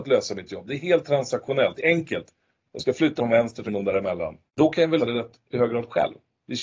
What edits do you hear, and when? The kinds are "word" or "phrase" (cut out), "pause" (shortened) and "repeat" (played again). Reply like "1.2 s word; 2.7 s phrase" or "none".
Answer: 1.8 s word; 3.2 s word; 3.7 s phrase; 4.5 s pause; 5.0 s word